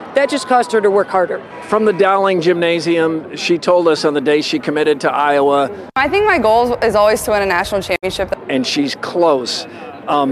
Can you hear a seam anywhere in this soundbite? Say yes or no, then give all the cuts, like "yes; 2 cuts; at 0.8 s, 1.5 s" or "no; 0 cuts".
no; 0 cuts